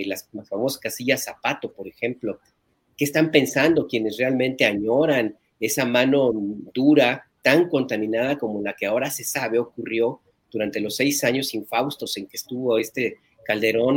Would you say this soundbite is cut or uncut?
uncut